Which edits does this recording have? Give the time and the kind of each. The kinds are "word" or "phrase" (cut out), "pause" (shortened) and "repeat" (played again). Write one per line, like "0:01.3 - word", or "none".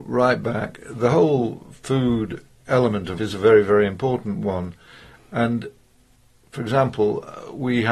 0:03.2 - word